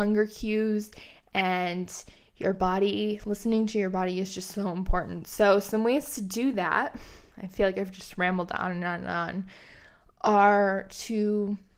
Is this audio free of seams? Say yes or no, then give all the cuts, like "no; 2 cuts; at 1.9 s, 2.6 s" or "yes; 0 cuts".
yes; 0 cuts